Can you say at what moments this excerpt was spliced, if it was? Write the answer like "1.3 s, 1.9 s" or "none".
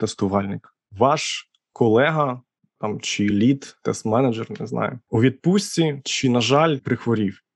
none